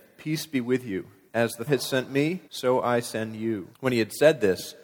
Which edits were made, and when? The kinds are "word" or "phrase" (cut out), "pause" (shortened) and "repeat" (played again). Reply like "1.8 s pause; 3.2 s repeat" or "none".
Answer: 1.3 s pause; 1.7 s word; 2.4 s pause; 3.7 s pause